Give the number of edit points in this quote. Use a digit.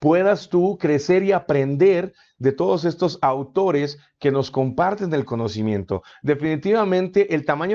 0